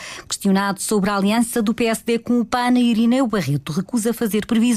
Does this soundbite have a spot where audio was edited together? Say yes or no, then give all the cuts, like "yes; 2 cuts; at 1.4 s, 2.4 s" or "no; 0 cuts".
no; 0 cuts